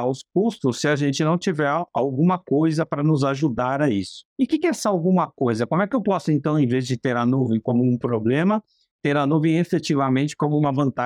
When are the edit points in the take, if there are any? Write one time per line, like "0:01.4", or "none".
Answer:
0:04.3

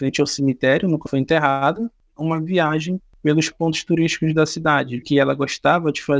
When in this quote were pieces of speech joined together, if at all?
0:01.1
0:02.2
0:03.5
0:05.0

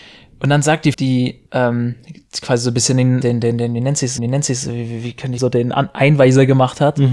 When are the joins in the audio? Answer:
0:00.9
0:01.5
0:03.2
0:04.2
0:05.4

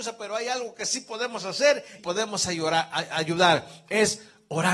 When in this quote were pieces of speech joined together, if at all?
0:02.0

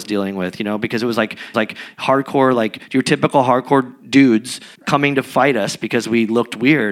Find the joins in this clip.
0:01.5
0:04.7

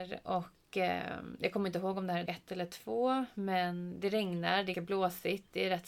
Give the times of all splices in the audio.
0:02.3
0:04.7

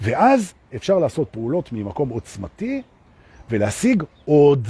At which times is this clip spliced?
none

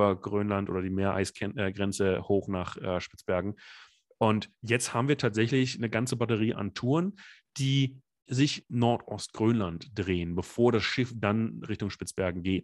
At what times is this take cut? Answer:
0:06.5
0:08.3
0:08.7

